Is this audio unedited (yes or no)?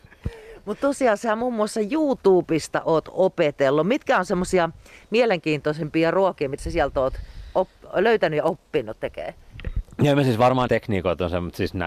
no